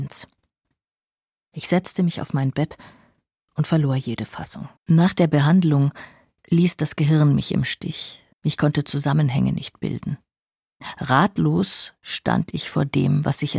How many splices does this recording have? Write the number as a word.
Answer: two